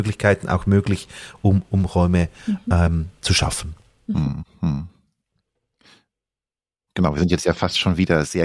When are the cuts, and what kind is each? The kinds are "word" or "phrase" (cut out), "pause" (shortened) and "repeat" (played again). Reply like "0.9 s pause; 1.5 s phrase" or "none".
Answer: none